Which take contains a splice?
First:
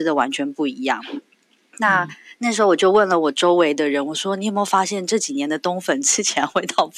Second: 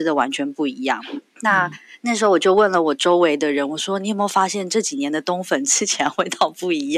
second; 1 cut; at 1.3 s

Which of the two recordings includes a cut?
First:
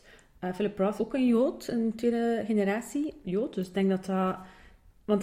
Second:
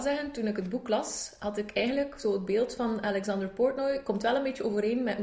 first; 2 cuts; at 1.0 s, 3.2 s

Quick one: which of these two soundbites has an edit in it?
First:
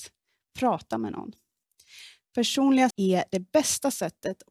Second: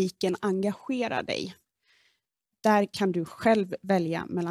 first; 1 cut; at 2.9 s

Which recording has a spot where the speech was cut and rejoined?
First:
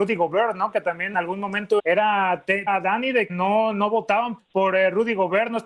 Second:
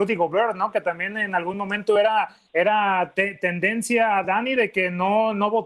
first; 5 cuts; at 1.1 s, 1.8 s, 2.7 s, 3.3 s, 4.4 s

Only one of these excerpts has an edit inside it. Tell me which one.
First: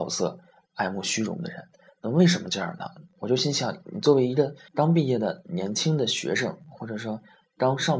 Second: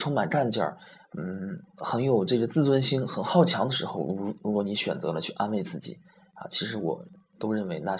first; 1 cut; at 4.7 s

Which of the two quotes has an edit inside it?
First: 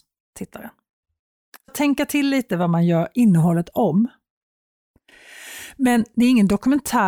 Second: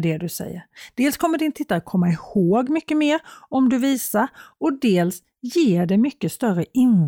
first; 1 cut; at 1.7 s

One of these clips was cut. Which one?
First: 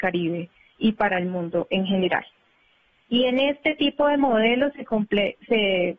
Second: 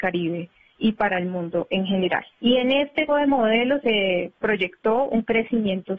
second; 3 cuts; at 2.3 s, 3.1 s, 3.8 s

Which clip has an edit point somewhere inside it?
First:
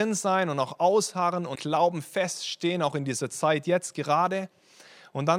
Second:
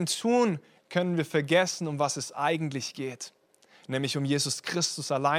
first; 1 cut; at 1.6 s

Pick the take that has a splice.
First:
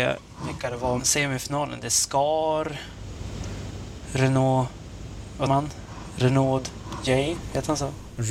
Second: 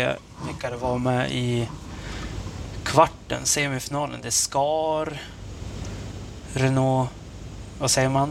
first; 2 cuts; at 1.0 s, 5.5 s

